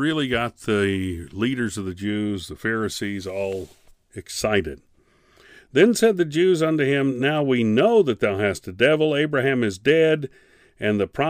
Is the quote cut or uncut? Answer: uncut